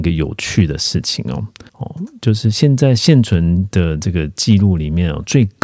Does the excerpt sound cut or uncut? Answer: cut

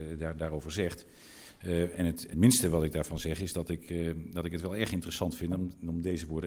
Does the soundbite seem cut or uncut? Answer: cut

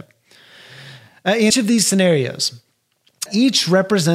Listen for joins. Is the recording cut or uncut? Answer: cut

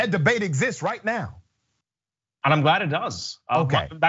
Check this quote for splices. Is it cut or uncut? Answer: uncut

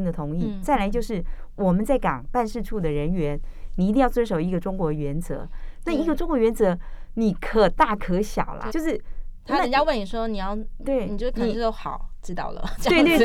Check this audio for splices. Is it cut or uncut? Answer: cut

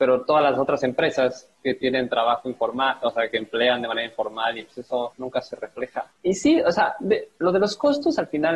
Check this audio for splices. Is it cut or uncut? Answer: uncut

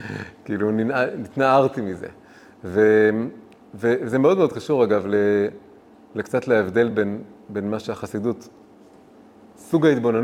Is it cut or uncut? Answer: uncut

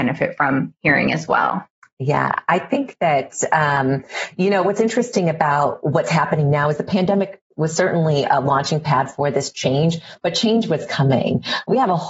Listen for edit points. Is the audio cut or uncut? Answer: uncut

